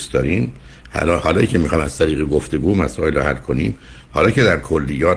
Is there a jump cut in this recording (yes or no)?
no